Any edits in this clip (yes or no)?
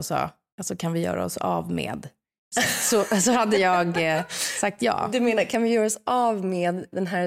no